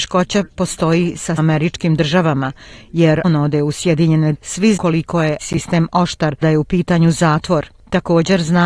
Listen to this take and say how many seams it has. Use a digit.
6